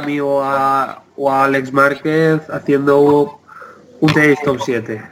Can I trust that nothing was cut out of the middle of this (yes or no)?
no